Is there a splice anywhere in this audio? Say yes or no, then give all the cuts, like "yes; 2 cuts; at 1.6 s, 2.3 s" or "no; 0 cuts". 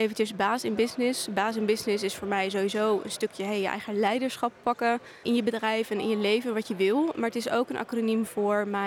yes; 1 cut; at 5.2 s